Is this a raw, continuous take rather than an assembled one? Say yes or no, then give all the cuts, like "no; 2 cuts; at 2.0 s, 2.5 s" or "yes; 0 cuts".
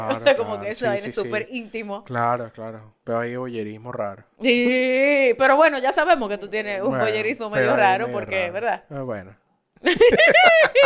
yes; 0 cuts